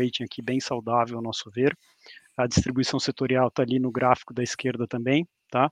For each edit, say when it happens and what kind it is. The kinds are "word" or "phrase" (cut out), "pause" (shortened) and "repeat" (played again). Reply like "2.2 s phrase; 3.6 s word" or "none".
none